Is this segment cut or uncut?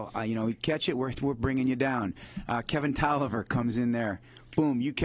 uncut